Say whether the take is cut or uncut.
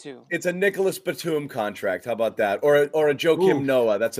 uncut